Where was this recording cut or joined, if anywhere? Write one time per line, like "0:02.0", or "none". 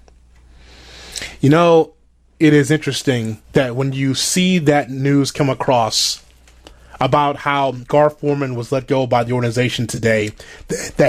0:03.4